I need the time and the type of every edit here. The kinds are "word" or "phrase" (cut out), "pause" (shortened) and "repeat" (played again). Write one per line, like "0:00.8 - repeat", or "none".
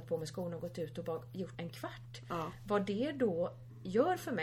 0:01.5 - word